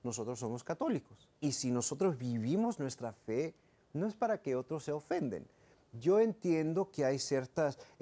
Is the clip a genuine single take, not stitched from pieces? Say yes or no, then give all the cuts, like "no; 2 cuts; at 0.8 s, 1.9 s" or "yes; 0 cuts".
no; 1 cut; at 1.3 s